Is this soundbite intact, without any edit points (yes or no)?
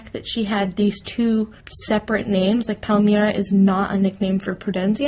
no